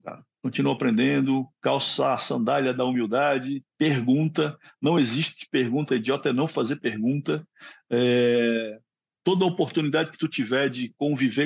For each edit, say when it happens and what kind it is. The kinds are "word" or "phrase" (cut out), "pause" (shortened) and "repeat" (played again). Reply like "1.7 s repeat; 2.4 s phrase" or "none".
3.7 s pause; 5.9 s word